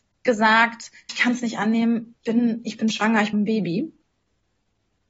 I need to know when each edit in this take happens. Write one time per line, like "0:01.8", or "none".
0:01.1
0:02.2
0:03.3